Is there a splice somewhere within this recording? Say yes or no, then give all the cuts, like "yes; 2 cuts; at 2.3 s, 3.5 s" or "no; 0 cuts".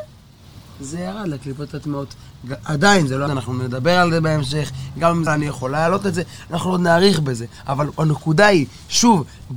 yes; 2 cuts; at 3.3 s, 5.3 s